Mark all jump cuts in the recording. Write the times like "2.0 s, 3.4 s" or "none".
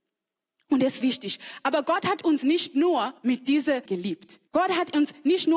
1.0 s, 3.2 s, 3.9 s, 4.5 s